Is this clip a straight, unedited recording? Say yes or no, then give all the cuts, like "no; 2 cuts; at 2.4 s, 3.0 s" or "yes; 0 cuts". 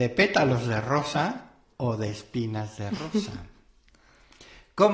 yes; 0 cuts